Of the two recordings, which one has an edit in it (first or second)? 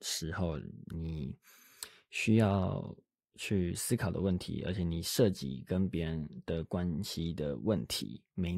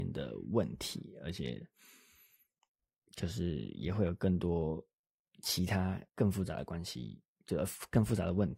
second